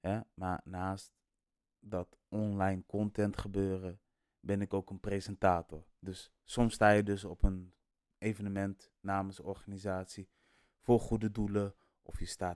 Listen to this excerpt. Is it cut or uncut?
uncut